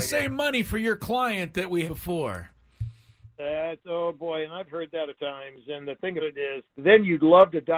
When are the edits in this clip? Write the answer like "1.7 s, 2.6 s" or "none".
1.8 s, 5.1 s, 6.2 s, 6.7 s